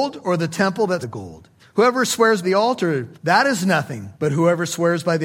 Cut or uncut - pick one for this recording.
cut